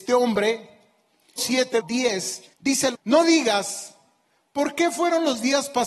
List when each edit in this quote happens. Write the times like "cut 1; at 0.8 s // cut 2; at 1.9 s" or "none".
cut 1; at 1.4 s // cut 2; at 1.8 s // cut 3; at 2.5 s // cut 4; at 2.9 s